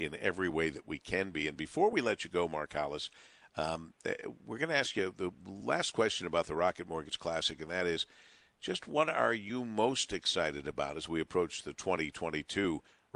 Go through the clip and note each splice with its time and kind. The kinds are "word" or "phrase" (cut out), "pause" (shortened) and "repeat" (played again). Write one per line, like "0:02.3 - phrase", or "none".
none